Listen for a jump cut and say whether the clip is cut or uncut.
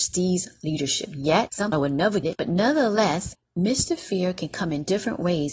cut